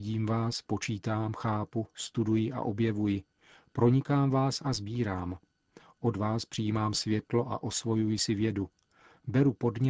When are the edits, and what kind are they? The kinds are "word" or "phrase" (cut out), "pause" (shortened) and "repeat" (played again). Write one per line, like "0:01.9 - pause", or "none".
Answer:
none